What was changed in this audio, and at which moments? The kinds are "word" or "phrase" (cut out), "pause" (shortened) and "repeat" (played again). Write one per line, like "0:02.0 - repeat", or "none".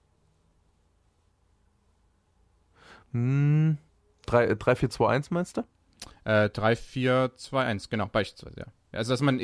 0:03.9 - pause